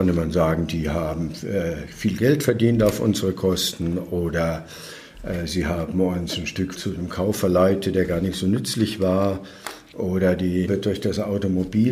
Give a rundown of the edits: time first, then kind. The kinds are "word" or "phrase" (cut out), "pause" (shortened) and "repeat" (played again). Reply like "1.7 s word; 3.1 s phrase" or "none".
6.7 s word; 10.7 s word